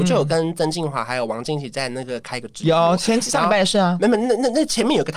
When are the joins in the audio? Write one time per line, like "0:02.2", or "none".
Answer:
0:02.2